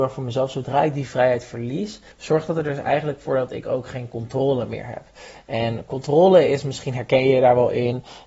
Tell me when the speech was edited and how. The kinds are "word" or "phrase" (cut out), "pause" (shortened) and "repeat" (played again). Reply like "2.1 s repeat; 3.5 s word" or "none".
2.1 s pause